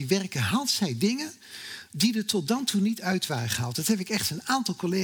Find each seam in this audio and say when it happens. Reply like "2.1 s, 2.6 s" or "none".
none